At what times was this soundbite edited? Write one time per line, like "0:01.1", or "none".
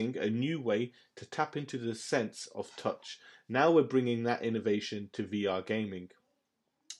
none